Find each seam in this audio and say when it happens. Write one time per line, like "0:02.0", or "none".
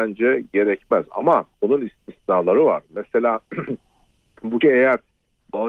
0:01.5
0:04.6